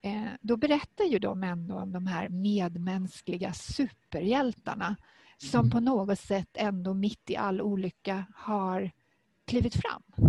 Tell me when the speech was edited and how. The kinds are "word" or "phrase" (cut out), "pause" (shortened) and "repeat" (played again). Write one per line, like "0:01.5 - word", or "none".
none

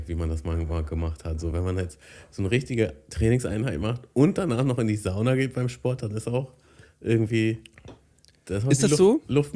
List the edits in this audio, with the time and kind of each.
none

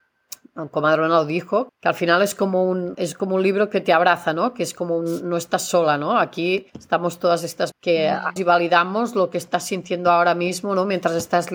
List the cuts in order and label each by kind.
0:01.7 - word
0:02.9 - word
0:06.7 - pause
0:07.7 - word
0:08.4 - word

